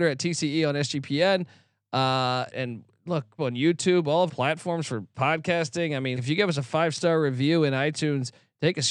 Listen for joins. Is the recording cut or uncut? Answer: cut